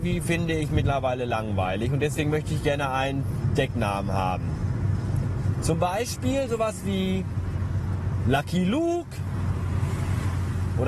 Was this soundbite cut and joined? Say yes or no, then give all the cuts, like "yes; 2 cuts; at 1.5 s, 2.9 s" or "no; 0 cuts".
no; 0 cuts